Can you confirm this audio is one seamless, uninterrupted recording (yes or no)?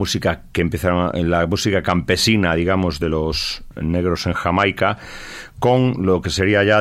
yes